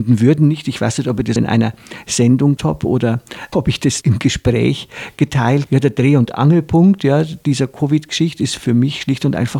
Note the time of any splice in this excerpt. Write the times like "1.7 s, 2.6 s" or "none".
1.4 s, 2.6 s, 3.5 s, 4.0 s, 5.7 s